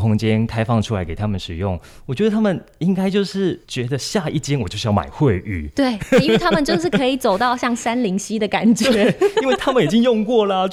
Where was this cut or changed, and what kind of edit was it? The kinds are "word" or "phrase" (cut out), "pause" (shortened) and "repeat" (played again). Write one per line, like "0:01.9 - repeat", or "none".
0:03.6 - pause